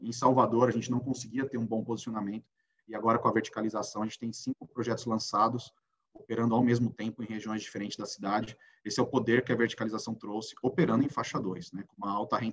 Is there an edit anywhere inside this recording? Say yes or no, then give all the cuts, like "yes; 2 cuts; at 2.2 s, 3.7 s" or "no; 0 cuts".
no; 0 cuts